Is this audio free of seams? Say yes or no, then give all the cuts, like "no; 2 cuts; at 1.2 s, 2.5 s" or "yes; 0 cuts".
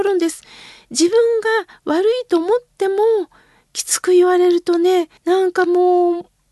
no; 1 cut; at 5.2 s